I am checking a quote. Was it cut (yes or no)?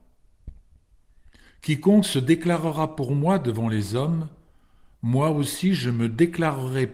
no